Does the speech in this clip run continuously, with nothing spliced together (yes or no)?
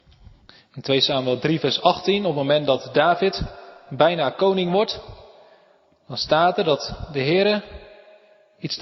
yes